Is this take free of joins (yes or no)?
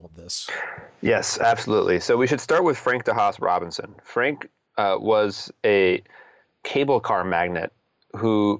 no